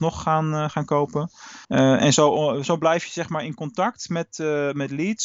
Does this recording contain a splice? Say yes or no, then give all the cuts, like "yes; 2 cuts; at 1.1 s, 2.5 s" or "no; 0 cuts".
yes; 1 cut; at 1.6 s